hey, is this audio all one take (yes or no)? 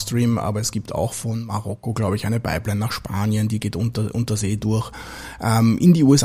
yes